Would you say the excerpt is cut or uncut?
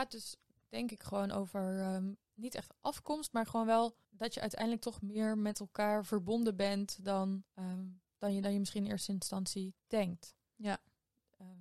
cut